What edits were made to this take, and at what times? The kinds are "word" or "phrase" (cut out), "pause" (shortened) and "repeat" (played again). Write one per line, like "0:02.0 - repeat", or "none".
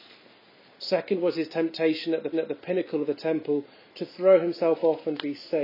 0:02.3 - repeat